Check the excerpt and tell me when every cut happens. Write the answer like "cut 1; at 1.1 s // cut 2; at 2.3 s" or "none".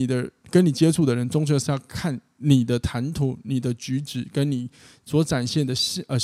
none